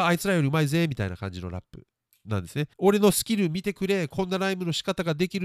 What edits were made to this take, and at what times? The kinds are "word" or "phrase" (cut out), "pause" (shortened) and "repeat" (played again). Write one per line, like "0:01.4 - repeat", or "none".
0:02.7 - pause

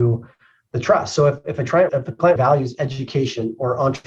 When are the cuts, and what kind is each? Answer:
0:01.9 - word
0:02.4 - word

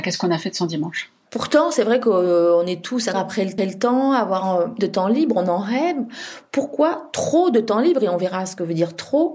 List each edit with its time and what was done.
0:01.2 - pause
0:03.1 - word
0:03.6 - repeat
0:04.8 - word

